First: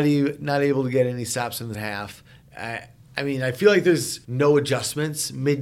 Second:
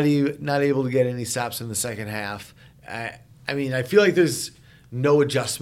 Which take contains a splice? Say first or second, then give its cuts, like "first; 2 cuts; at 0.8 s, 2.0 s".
first; 2 cuts; at 1.7 s, 4.2 s